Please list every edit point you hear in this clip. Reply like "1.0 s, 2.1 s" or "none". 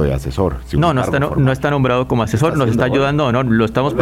none